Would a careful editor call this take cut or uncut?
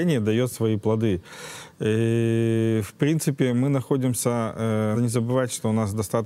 cut